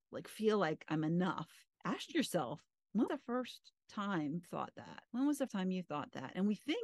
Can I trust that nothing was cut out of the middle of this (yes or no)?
no